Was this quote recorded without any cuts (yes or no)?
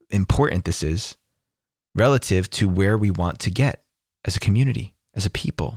yes